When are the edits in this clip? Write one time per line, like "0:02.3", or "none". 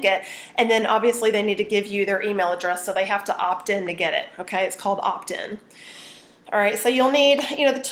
none